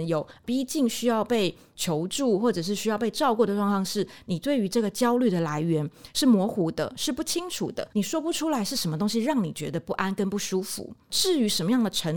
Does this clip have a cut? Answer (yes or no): yes